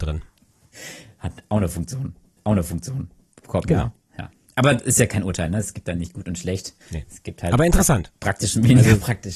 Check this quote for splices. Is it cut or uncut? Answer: cut